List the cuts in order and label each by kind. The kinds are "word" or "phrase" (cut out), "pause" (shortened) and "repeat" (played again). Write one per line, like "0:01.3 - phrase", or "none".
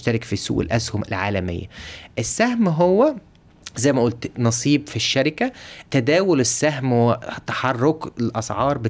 0:05.9 - pause